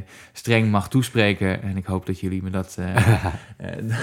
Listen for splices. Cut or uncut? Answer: uncut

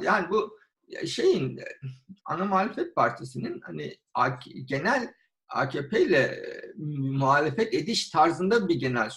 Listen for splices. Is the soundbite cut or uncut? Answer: cut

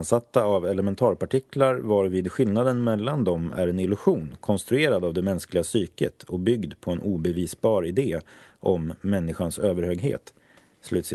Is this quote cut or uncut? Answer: uncut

